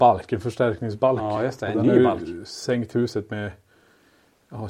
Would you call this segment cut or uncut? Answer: uncut